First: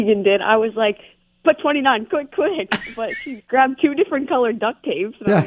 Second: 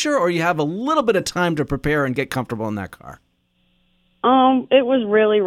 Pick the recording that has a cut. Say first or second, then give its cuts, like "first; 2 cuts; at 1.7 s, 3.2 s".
first; 2 cuts; at 2.1 s, 3.4 s